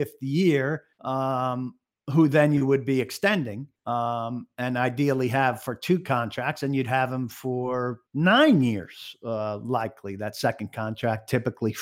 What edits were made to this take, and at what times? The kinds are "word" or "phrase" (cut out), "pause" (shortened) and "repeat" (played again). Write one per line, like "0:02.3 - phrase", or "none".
0:00.9 - pause
0:03.8 - pause
0:08.1 - pause